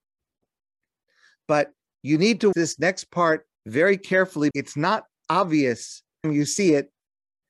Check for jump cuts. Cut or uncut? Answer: cut